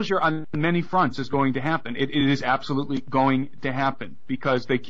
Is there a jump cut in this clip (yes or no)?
no